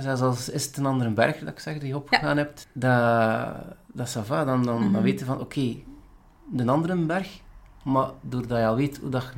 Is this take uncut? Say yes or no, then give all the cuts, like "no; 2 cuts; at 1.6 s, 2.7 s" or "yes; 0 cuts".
yes; 0 cuts